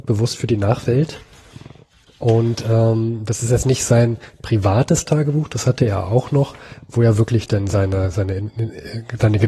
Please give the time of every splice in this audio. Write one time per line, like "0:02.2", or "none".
none